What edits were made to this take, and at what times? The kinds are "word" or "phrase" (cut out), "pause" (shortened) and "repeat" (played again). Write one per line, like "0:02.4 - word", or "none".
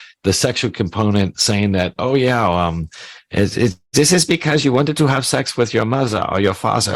none